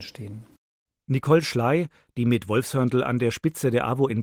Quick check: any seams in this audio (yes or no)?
no